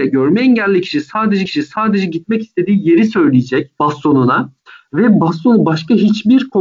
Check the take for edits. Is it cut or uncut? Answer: cut